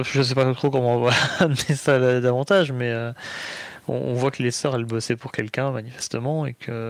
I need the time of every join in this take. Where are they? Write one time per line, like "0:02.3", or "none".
none